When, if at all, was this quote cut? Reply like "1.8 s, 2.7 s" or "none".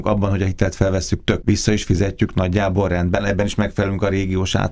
1.4 s